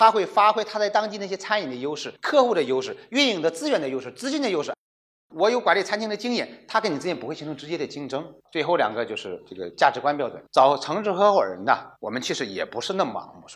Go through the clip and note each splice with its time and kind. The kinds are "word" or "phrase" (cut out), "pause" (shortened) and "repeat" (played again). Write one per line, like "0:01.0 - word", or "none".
0:02.2 - pause
0:08.4 - pause
0:10.5 - pause
0:12.0 - pause

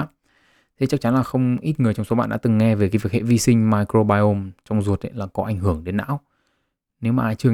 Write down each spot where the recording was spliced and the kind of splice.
none

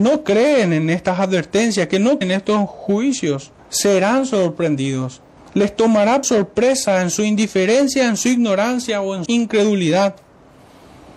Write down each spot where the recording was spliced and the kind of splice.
0:02.2 - word
0:03.6 - pause
0:05.4 - pause
0:06.2 - word
0:09.3 - word

